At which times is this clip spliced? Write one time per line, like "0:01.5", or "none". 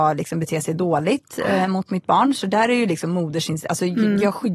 none